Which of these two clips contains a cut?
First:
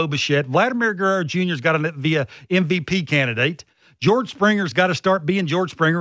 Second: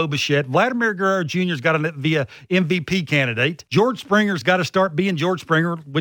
second; 1 cut; at 3.7 s

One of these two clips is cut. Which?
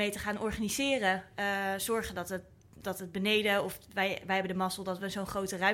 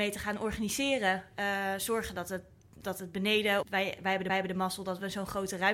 second; 2 cuts; at 3.6 s, 4.3 s

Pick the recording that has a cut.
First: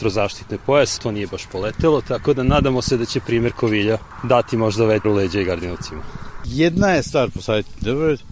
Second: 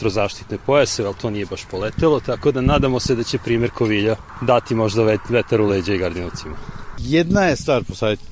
first; 2 cuts; at 1.0 s, 5.0 s

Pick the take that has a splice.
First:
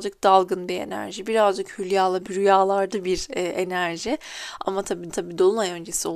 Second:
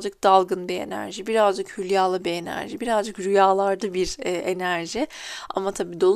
first; 2 cuts; at 2.3 s, 5.1 s

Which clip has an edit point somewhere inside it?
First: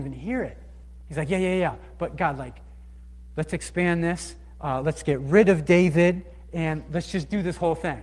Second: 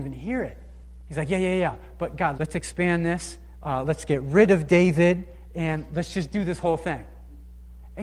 second; 1 cut; at 2.4 s

